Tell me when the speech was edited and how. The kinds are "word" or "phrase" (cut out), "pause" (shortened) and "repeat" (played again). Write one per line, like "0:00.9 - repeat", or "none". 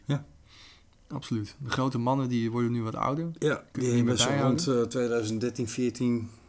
none